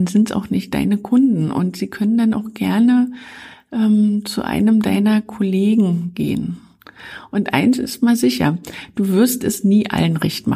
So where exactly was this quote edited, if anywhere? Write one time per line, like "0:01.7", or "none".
none